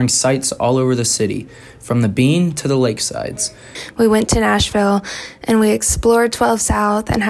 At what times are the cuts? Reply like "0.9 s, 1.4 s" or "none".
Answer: none